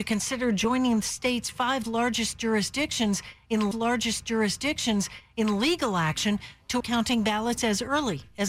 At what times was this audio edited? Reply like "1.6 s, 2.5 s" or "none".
3.7 s, 6.8 s